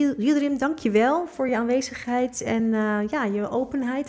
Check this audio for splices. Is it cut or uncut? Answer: uncut